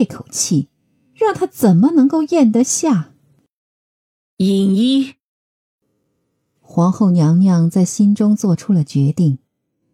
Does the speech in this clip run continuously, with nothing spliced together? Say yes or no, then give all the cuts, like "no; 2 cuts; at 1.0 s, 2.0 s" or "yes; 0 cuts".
yes; 0 cuts